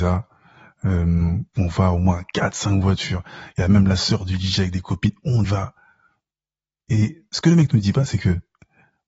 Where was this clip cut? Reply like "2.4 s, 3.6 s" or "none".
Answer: 5.4 s